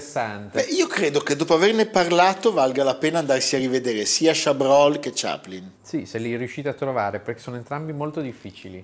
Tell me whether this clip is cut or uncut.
uncut